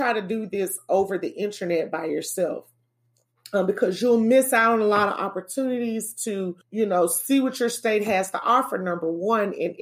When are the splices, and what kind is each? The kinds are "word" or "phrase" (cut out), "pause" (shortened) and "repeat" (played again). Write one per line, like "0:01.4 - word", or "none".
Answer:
0:06.6 - pause